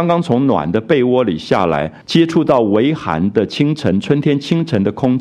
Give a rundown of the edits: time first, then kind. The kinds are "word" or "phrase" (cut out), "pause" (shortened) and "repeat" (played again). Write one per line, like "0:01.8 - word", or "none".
0:02.0 - pause